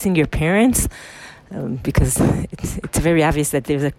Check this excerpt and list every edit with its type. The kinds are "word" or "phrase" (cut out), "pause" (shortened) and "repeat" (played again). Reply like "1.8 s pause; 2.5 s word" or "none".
none